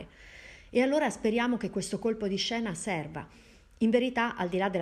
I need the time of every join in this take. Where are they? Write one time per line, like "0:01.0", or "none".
none